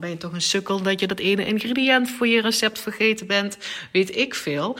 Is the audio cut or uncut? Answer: uncut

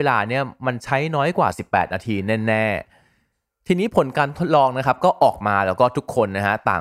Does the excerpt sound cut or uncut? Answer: uncut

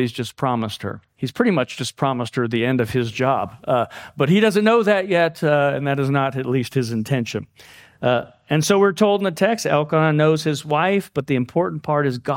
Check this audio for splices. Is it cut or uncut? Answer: cut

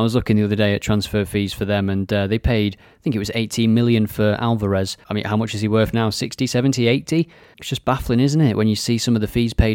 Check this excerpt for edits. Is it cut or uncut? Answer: cut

